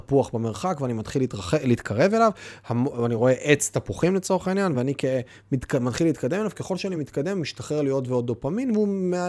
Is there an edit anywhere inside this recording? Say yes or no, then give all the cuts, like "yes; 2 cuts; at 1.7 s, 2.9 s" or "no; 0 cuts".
no; 0 cuts